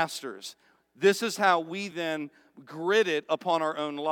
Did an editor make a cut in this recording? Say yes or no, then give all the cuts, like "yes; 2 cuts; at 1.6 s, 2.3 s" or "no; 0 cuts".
no; 0 cuts